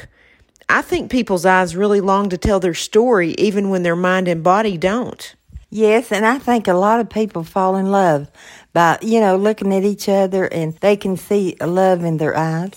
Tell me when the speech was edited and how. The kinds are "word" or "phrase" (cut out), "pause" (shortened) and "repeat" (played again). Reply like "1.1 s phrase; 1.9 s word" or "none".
5.6 s pause; 10.8 s pause